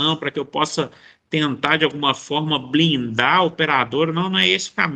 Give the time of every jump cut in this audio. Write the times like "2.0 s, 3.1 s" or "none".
none